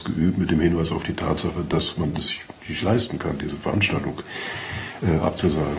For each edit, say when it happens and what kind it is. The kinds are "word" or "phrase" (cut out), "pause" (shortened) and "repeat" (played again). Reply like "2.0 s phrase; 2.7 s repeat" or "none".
none